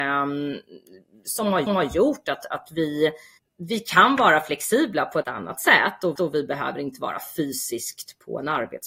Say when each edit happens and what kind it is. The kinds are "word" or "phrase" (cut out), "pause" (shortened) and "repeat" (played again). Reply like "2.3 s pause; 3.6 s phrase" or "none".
1.7 s repeat; 3.4 s pause; 5.2 s word; 6.2 s repeat